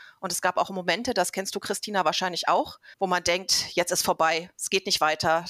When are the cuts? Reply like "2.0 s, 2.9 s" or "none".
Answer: 2.9 s